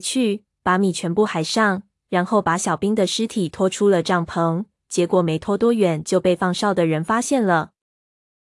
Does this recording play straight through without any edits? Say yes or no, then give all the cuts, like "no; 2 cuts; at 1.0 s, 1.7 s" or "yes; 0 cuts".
yes; 0 cuts